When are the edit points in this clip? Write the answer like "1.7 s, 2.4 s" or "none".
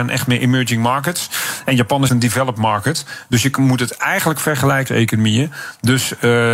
2.1 s, 4.9 s